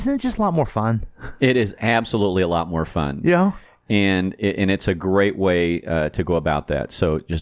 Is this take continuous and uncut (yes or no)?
yes